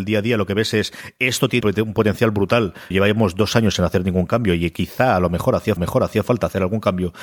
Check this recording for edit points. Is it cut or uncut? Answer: cut